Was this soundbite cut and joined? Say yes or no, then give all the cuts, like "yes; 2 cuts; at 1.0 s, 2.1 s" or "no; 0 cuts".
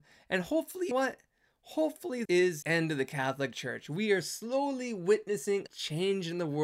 yes; 4 cuts; at 0.9 s, 2.3 s, 2.6 s, 5.7 s